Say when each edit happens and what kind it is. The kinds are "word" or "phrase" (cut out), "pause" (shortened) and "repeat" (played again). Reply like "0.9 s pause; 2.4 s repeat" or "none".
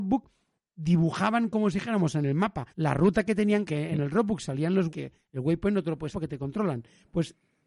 2.7 s pause; 3.6 s phrase; 4.9 s word; 6.1 s word